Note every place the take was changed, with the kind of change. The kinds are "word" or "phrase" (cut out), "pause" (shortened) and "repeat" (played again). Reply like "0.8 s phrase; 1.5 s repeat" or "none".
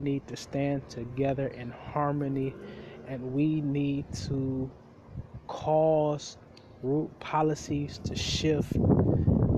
none